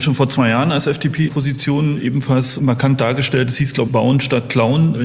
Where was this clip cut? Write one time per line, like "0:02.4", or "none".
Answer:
0:01.3
0:03.9